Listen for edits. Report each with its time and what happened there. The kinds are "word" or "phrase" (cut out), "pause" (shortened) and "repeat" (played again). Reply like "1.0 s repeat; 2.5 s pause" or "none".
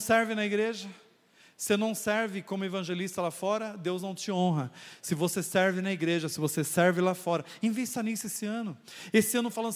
none